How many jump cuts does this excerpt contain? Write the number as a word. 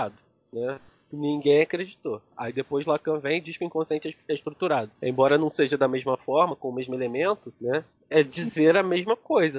one